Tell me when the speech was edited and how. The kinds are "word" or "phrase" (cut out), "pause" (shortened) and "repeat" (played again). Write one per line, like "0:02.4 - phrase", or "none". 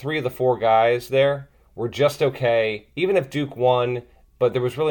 none